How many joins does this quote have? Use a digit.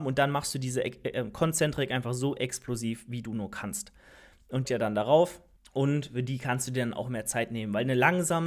2